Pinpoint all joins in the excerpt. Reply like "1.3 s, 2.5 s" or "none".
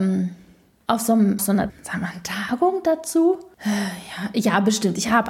1.4 s, 1.7 s